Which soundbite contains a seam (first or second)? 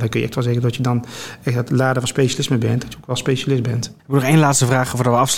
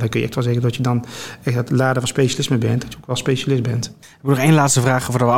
first